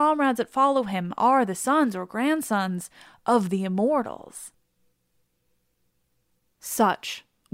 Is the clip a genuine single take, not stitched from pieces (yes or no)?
yes